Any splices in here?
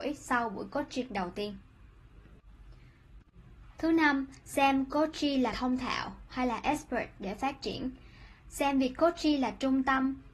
yes; 1 cut; at 5.5 s

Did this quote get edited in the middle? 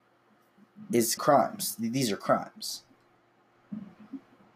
yes; 1 cut; at 1.2 s

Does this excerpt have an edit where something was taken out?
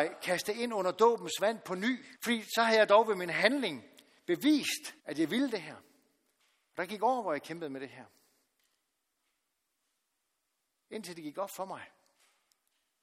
yes; 3 cuts; at 2.2 s, 5.0 s, 6.4 s

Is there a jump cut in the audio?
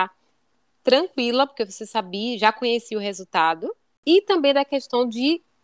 no; 0 cuts

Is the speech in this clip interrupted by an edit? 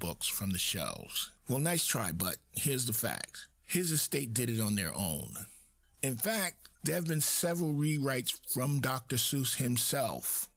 yes; 4 cuts; at 1.4 s, 3.5 s, 5.8 s, 6.7 s

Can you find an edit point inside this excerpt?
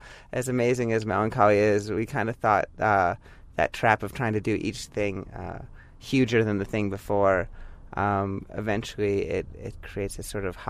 no; 0 cuts

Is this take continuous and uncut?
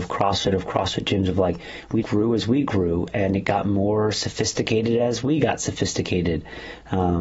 no; 1 cut; at 2.0 s

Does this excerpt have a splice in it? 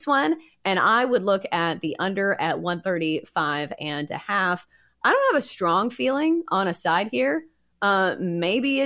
no; 0 cuts

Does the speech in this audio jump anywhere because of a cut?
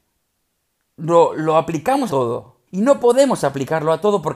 yes; 2 cuts; at 2.1 s, 2.7 s

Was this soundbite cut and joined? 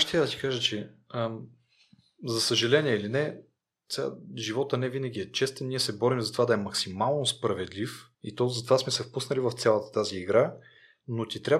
yes; 2 cuts; at 3.6 s, 8.1 s

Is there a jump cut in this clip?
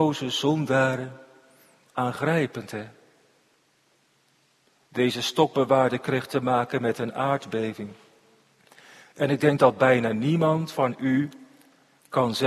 no; 0 cuts

